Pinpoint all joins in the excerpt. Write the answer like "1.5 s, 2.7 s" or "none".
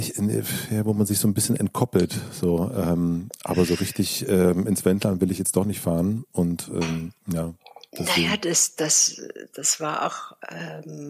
7.2 s